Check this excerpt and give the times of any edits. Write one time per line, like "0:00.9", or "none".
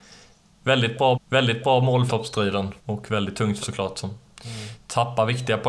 0:01.1
0:02.1
0:02.8
0:03.6